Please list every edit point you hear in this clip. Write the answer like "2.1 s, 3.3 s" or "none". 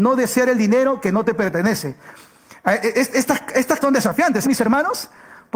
3.8 s, 4.4 s